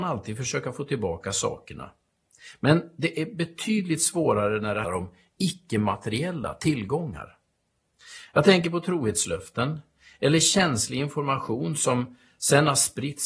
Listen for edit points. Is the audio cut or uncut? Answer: cut